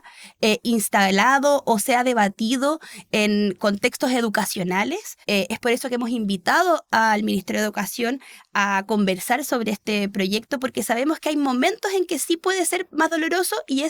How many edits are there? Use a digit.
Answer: 1